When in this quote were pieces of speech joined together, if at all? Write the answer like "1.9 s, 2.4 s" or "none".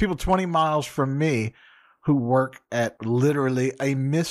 none